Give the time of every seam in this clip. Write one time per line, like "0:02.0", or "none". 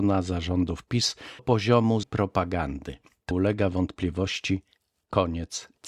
0:01.4
0:02.0
0:03.3

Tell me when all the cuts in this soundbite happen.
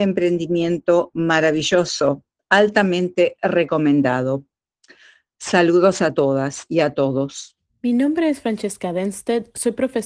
0:07.7

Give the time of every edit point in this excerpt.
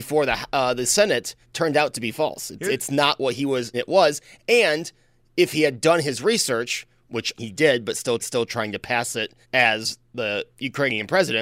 0:01.4
0:03.7
0:07.4
0:08.2
0:09.4
0:10.5

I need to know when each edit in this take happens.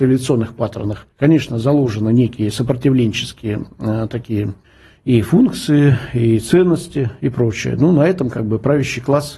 0:01.1
0:04.6

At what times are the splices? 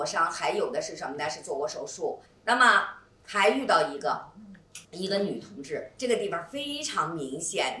0:02.3
0:04.8

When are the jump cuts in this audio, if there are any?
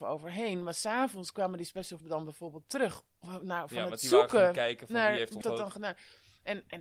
0:02.0
0:05.4

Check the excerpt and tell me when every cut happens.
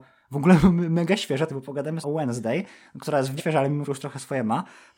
0:01.5
0:02.0
0:03.4
0:03.8

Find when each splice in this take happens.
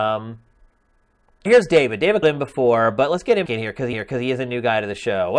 0:01.5
0:02.2
0:03.5
0:03.9

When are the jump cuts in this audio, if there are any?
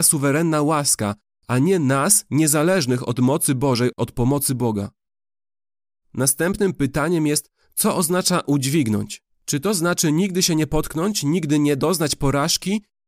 none

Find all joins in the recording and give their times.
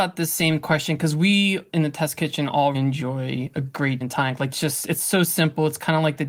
0:02.7
0:04.0
0:04.5

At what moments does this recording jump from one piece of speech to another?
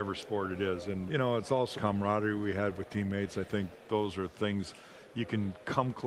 0:01.1
0:01.7

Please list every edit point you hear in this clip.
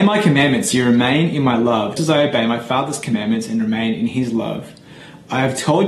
0:02.0

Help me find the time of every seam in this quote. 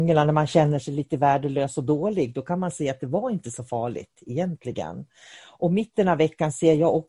none

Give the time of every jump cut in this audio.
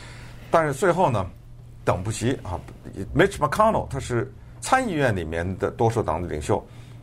0:03.1

